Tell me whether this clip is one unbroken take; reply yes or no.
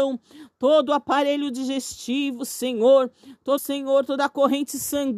no